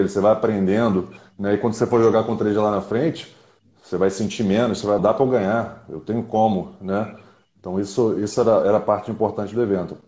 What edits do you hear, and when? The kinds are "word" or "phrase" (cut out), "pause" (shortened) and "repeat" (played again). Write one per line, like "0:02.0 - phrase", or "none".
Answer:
0:05.0 - word

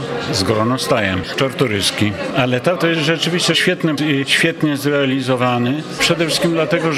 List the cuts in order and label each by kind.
0:01.3 - word
0:02.8 - word
0:04.0 - word

